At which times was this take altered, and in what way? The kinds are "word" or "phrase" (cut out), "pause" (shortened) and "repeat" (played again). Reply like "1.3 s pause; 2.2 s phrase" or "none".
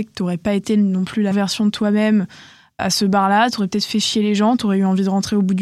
1.3 s word; 2.8 s word